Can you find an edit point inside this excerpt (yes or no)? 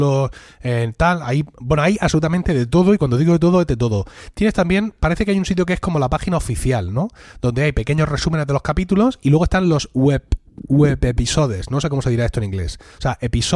no